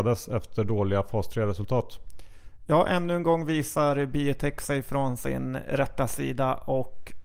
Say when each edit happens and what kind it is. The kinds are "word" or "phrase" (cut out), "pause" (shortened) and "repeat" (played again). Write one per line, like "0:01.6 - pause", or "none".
none